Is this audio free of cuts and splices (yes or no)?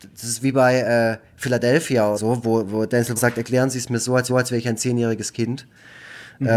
no